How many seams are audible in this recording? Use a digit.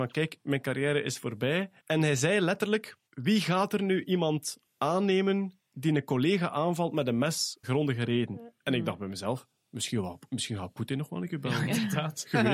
3